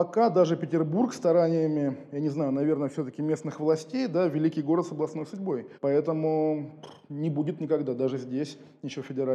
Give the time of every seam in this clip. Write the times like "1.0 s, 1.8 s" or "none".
5.7 s